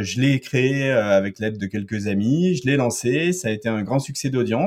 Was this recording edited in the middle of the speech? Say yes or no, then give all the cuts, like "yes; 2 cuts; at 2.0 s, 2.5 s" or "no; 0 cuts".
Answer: no; 0 cuts